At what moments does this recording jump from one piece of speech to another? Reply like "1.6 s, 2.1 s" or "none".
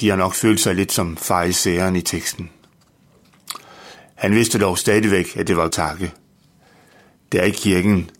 5.7 s